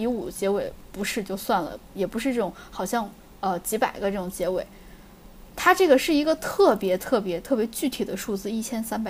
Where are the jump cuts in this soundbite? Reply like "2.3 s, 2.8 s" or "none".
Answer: none